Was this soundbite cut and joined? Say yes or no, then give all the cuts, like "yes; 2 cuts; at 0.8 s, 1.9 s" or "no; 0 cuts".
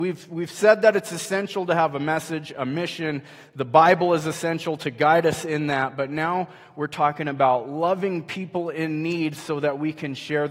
no; 0 cuts